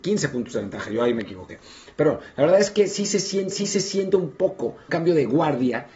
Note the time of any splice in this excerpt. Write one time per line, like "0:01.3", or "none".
0:03.5
0:04.9